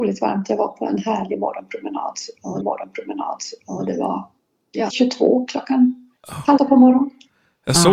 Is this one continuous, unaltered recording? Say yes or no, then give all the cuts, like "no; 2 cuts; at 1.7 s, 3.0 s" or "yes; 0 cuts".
no; 4 cuts; at 2.6 s, 4.9 s, 6.2 s, 6.6 s